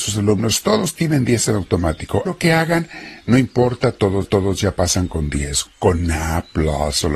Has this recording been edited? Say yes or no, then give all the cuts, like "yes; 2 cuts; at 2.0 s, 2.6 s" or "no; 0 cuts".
yes; 3 cuts; at 2.3 s, 4.2 s, 5.7 s